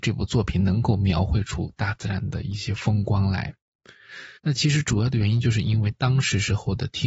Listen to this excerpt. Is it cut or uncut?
cut